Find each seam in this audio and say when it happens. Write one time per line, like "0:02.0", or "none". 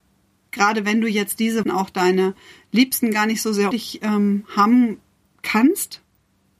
0:01.6
0:03.7